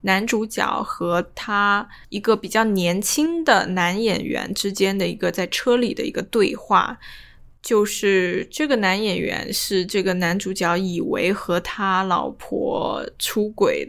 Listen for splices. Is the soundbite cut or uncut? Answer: cut